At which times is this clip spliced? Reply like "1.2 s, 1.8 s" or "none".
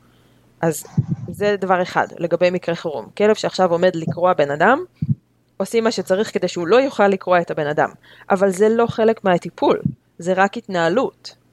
none

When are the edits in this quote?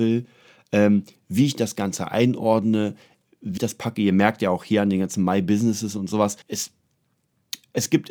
3.6 s, 6.4 s

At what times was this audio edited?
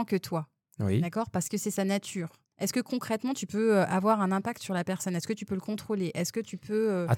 2.4 s

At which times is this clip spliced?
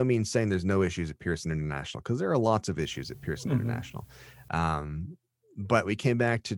none

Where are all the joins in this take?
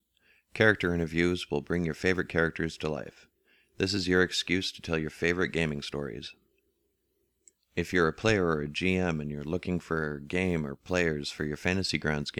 none

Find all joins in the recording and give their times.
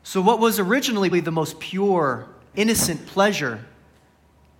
1.1 s, 2.5 s

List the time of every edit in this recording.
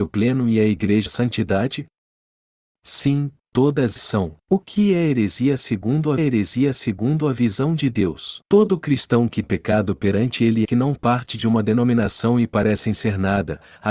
1.1 s, 4.0 s, 4.4 s, 6.2 s, 8.4 s, 9.4 s, 10.6 s, 10.9 s

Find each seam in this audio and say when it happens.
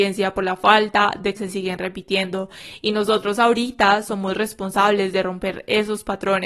1.4 s

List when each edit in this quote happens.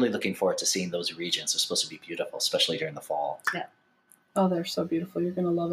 none

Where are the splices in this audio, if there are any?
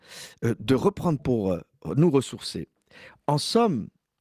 1.2 s

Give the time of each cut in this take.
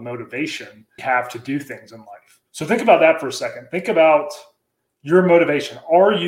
1.0 s, 2.5 s

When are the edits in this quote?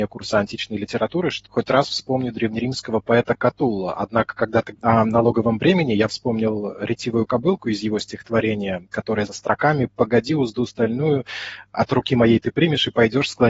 1.5 s, 4.7 s, 9.3 s

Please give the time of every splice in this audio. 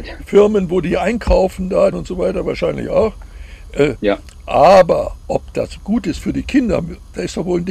1.9 s, 5.8 s

